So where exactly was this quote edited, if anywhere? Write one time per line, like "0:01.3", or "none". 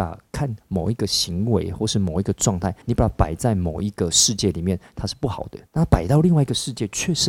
0:02.8
0:05.7